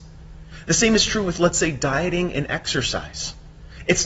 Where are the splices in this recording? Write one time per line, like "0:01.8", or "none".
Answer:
none